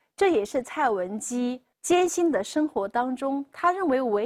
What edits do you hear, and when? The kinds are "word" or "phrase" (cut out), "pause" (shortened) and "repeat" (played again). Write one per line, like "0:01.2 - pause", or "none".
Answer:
0:01.7 - pause